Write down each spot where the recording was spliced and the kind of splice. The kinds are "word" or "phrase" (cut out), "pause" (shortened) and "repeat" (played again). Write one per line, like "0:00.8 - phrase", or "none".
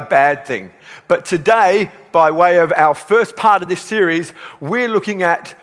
none